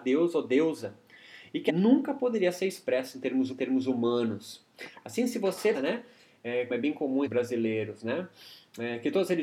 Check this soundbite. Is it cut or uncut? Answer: cut